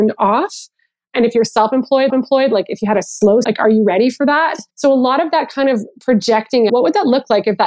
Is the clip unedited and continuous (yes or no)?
no